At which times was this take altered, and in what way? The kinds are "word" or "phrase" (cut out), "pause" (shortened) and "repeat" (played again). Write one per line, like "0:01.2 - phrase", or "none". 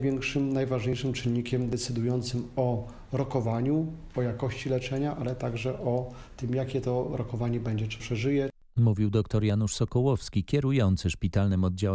0:08.0 - word